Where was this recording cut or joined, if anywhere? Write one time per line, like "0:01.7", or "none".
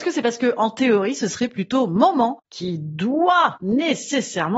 none